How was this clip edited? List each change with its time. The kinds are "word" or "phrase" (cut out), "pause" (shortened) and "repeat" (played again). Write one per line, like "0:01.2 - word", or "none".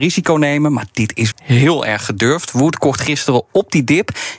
0:01.3 - word